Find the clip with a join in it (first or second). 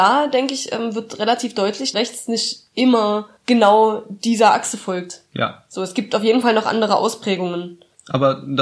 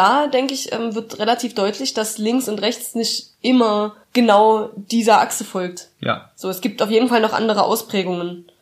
first